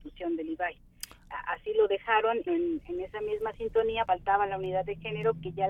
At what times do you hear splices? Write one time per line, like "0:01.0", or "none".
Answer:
0:02.5
0:04.1